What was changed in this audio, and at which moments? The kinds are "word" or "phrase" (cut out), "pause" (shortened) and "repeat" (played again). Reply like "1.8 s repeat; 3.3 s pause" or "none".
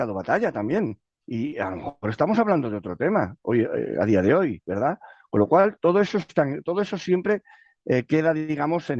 none